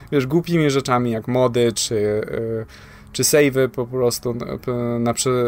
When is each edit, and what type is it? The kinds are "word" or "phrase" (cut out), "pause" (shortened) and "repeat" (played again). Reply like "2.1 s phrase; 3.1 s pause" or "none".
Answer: none